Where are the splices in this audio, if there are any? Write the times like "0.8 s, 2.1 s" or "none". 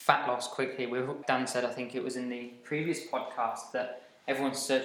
1.2 s